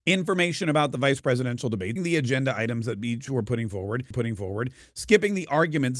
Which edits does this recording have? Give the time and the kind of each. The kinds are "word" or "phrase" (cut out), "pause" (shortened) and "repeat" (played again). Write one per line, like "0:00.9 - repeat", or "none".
0:02.0 - word
0:04.1 - repeat